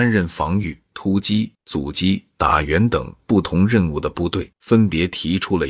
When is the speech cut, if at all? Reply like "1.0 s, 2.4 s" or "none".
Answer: 4.5 s